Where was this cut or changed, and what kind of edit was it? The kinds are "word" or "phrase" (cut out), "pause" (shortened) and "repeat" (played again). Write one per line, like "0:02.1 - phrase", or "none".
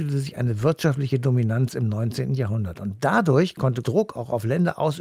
0:03.8 - word